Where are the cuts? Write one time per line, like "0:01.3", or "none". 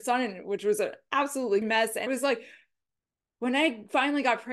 0:01.6
0:02.1